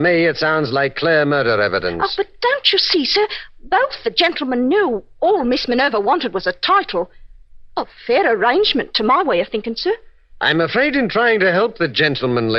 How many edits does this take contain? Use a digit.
0